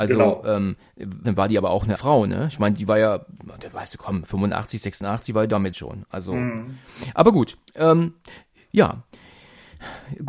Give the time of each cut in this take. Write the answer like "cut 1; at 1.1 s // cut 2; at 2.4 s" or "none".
cut 1; at 1.2 s // cut 2; at 2.0 s // cut 3; at 5.7 s // cut 4; at 7.7 s